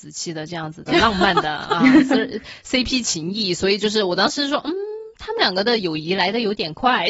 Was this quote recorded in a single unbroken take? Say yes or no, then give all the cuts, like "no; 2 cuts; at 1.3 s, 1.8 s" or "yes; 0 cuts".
yes; 0 cuts